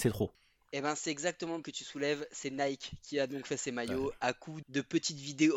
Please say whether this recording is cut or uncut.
cut